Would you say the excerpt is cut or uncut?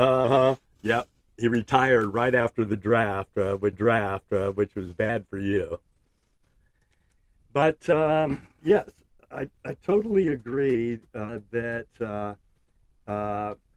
cut